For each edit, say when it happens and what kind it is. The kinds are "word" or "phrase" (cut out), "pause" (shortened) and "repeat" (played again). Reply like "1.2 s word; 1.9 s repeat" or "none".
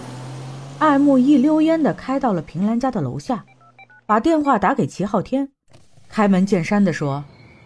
none